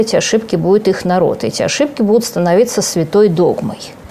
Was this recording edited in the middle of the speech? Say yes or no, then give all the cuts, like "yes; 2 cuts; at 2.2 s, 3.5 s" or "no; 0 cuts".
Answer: no; 0 cuts